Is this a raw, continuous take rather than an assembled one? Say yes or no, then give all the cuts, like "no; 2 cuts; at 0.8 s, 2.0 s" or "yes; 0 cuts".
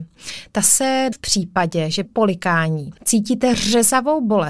no; 3 cuts; at 1.1 s, 2.1 s, 3.0 s